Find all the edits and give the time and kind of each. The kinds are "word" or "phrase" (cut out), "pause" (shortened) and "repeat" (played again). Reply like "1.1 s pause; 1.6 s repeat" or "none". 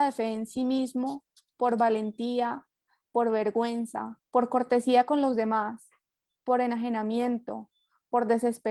4.3 s pause